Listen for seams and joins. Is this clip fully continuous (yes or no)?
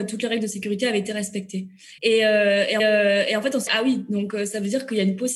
no